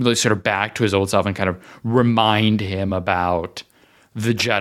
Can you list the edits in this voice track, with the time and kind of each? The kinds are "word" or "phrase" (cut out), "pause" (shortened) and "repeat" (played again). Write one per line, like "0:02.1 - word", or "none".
none